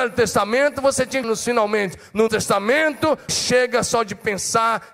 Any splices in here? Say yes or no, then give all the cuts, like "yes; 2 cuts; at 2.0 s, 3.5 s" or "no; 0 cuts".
yes; 3 cuts; at 1.2 s, 2.3 s, 3.3 s